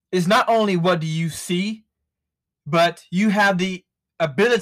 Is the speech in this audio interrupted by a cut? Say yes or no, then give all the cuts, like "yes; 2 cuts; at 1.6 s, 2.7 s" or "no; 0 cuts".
no; 0 cuts